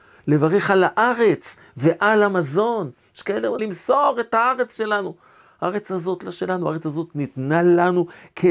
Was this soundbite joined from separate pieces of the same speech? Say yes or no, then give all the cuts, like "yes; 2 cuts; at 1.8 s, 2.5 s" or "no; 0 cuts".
yes; 1 cut; at 3.6 s